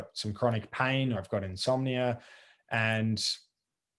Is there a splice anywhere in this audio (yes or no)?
yes